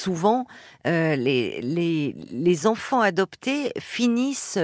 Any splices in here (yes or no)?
no